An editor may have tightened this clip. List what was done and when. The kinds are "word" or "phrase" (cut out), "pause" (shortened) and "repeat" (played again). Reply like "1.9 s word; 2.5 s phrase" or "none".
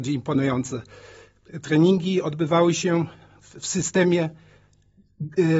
none